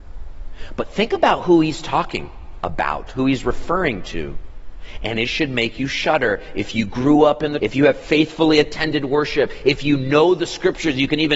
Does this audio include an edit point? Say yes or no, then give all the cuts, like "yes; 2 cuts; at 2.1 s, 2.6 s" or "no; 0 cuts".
yes; 1 cut; at 7.6 s